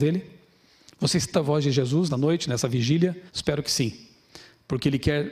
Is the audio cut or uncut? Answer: cut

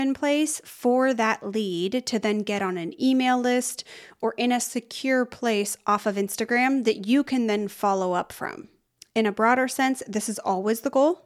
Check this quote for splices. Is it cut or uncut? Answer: uncut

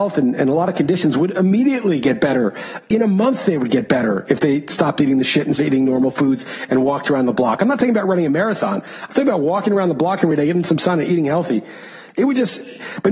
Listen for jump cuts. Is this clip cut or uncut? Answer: cut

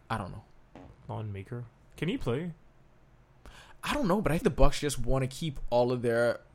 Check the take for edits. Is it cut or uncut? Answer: cut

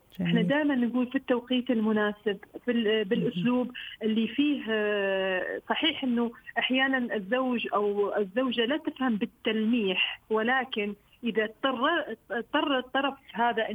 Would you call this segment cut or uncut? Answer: cut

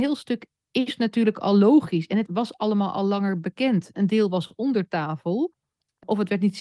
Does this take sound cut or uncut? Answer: uncut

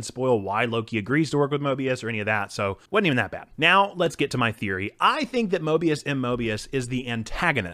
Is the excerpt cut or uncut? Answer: cut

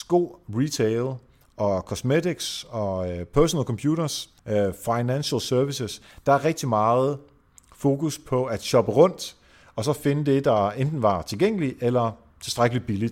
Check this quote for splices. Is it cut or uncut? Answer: cut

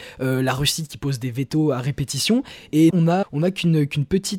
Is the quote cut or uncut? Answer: cut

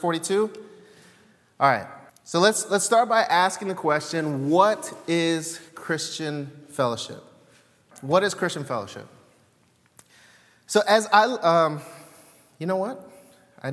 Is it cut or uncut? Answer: cut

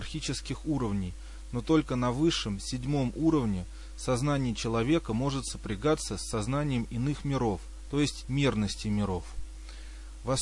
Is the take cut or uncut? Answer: cut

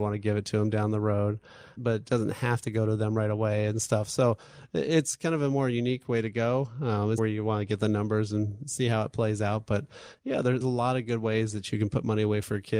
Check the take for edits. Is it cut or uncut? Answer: cut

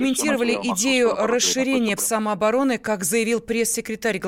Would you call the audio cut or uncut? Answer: cut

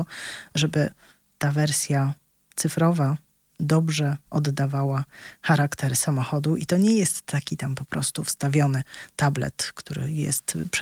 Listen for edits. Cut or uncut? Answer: uncut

